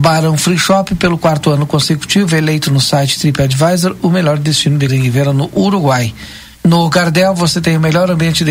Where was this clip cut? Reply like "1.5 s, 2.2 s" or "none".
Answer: 4.9 s, 6.5 s